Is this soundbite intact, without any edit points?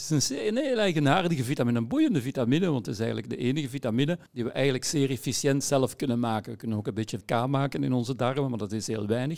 no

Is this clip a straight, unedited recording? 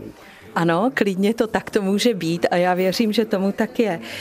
yes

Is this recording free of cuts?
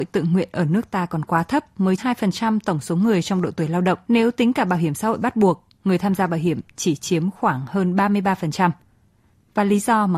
no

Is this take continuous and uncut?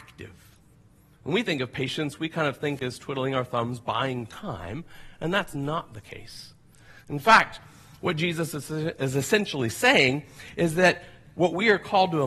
yes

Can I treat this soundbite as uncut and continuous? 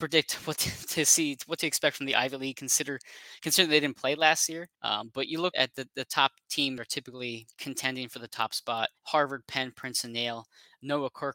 no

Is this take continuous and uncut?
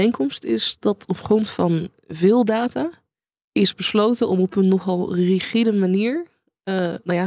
yes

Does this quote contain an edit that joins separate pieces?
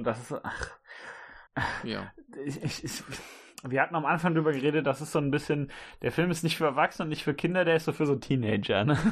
yes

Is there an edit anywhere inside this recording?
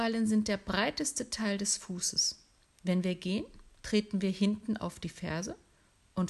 no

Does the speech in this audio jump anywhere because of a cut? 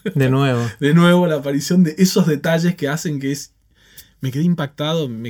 no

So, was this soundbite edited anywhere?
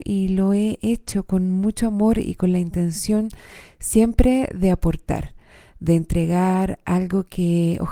no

